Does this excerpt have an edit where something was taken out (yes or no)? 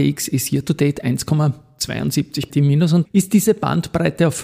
yes